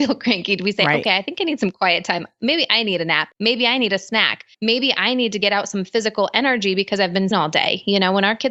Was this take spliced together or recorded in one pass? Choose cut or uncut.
cut